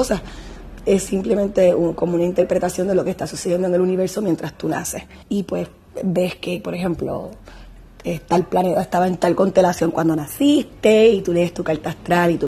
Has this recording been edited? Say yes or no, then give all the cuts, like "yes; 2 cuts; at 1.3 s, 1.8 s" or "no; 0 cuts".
yes; 1 cut; at 5.2 s